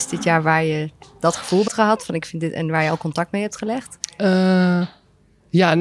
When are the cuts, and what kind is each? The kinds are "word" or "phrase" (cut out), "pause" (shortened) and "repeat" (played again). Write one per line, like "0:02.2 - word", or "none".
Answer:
0:01.7 - word